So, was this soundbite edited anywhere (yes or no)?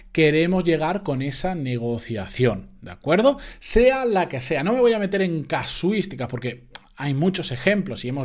no